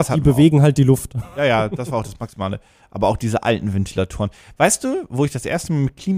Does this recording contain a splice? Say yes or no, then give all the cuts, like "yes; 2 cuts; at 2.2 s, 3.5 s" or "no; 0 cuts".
no; 0 cuts